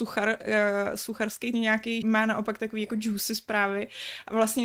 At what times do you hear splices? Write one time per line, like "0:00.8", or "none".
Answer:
0:01.5
0:02.0